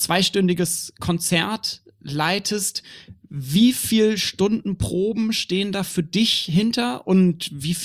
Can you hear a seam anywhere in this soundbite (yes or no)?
no